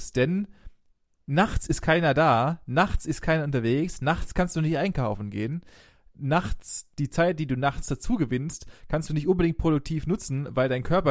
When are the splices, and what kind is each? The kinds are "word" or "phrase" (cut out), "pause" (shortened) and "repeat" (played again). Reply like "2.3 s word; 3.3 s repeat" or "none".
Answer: none